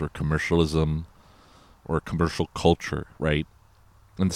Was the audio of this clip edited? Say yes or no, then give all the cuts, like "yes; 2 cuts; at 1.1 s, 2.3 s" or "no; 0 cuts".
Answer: no; 0 cuts